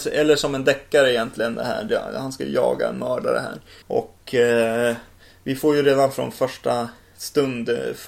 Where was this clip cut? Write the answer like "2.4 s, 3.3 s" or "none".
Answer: none